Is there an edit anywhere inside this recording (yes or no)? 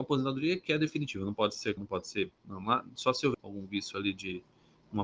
yes